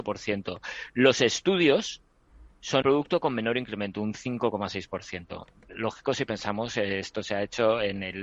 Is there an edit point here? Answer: yes; 1 cut; at 2.8 s

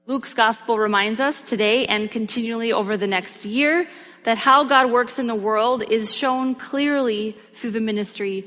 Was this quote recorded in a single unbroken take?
yes; 0 cuts

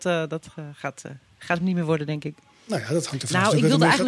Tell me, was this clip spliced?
no; 0 cuts

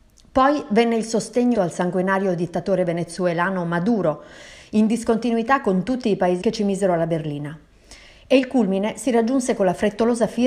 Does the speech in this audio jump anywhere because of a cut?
yes; 2 cuts; at 1.5 s, 6.4 s

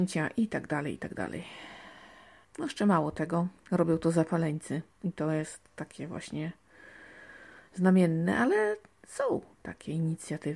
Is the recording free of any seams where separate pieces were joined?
yes; 0 cuts

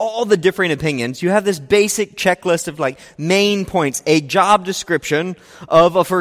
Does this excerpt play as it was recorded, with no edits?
yes; 0 cuts

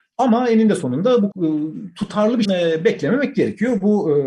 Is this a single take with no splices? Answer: no; 2 cuts; at 1.3 s, 2.4 s

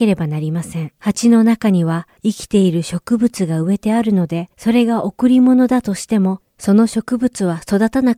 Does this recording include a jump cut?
yes; 4 cuts; at 1.0 s, 2.2 s, 4.5 s, 6.5 s

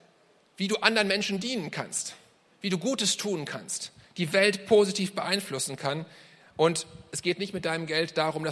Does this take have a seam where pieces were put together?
no; 0 cuts

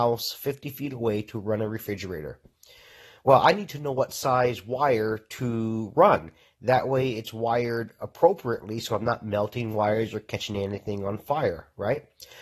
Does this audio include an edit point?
no; 0 cuts

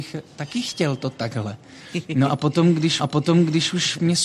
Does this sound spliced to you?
yes; 1 cut; at 3.0 s

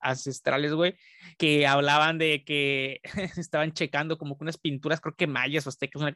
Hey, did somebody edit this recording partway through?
yes; 1 cut; at 1.3 s

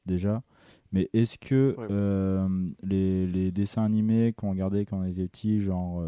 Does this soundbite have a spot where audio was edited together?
no; 0 cuts

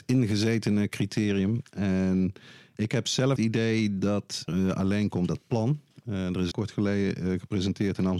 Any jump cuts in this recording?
yes; 4 cuts; at 3.4 s, 4.5 s, 5.3 s, 6.5 s

